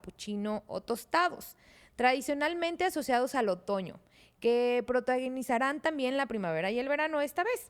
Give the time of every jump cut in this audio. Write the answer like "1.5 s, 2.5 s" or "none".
none